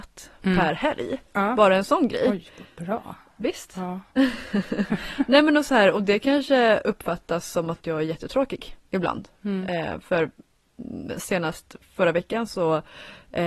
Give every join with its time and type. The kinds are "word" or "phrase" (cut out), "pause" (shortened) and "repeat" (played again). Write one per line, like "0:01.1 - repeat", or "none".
0:01.3 - pause